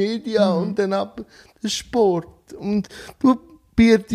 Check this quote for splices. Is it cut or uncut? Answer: uncut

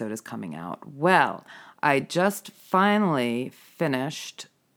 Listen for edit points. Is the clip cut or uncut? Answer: uncut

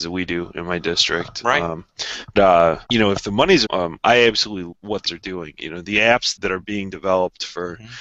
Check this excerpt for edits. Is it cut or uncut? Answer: cut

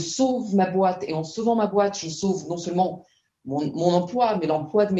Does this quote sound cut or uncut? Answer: uncut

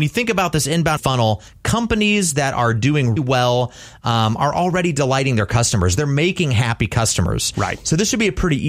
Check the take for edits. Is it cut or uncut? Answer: cut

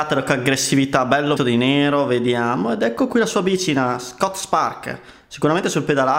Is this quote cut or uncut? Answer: cut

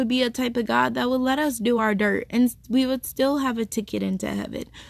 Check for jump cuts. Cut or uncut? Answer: uncut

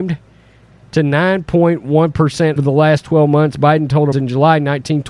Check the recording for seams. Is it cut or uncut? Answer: cut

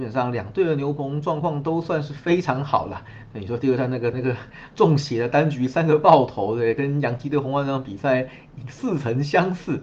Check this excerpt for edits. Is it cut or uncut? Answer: cut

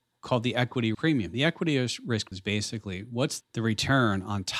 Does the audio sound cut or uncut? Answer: cut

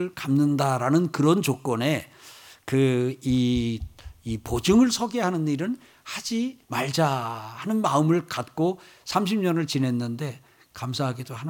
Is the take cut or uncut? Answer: cut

